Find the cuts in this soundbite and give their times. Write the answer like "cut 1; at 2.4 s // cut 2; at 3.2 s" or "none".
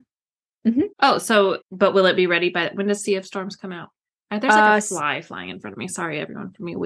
cut 1; at 0.9 s // cut 2; at 1.6 s